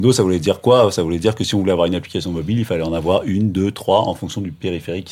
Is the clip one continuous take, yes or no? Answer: yes